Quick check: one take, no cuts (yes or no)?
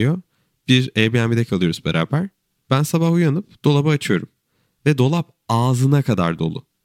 yes